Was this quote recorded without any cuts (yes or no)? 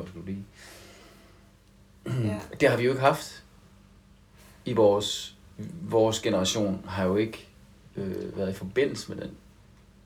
yes